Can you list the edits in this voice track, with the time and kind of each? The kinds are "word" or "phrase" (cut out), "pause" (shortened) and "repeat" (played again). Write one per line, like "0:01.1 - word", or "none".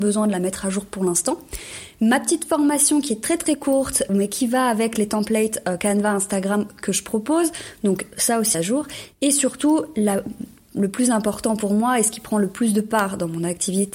0:04.1 - word
0:08.5 - phrase